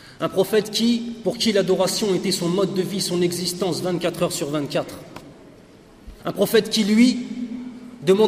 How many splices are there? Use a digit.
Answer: 1